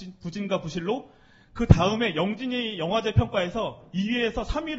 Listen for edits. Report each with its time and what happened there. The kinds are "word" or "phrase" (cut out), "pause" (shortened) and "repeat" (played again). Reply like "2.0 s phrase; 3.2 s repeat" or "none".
none